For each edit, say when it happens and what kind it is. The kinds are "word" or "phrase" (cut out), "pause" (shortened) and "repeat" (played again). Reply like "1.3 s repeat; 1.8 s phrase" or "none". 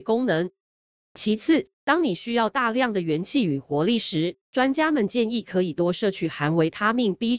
1.7 s pause; 4.4 s pause